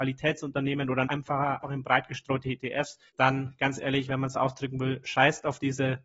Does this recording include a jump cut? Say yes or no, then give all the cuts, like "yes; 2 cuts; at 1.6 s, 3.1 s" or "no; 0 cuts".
yes; 3 cuts; at 1.0 s, 1.6 s, 3.1 s